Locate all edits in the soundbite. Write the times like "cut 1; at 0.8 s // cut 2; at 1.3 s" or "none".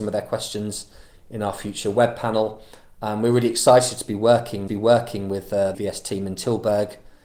cut 1; at 4.7 s // cut 2; at 5.7 s